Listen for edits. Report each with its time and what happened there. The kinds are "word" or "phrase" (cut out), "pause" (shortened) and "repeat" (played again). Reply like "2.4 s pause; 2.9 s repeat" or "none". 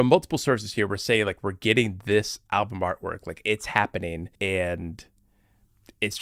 4.3 s pause